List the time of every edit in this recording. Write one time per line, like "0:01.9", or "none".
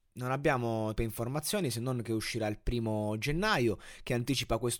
0:01.0